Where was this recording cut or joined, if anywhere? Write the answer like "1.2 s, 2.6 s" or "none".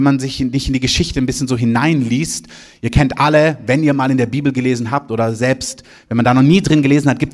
none